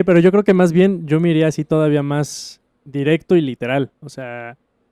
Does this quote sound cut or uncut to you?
cut